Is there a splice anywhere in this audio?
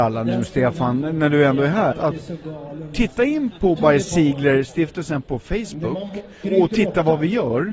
yes; 3 cuts; at 1.9 s, 3.8 s, 6.4 s

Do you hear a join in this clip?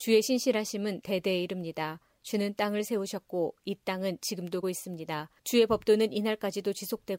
yes; 2 cuts; at 4.6 s, 5.4 s

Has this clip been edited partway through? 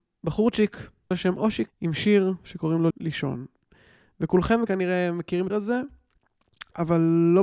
yes; 5 cuts; at 1.1 s, 1.7 s, 2.9 s, 4.7 s, 5.5 s

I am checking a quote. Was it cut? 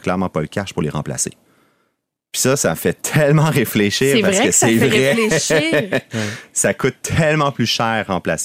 no; 0 cuts

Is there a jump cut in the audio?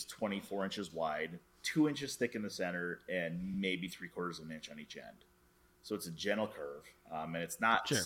no; 0 cuts

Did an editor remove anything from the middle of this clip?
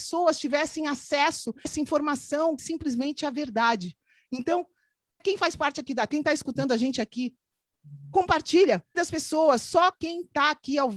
yes; 5 cuts; at 1.6 s, 2.6 s, 5.2 s, 6.1 s, 8.9 s

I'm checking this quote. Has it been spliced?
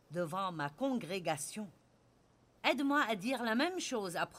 no; 0 cuts

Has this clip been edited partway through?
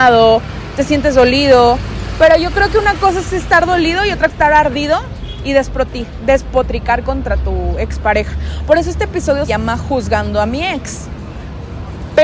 yes; 2 cuts; at 4.3 s, 9.5 s

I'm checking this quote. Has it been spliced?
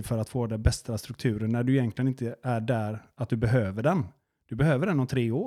no; 0 cuts

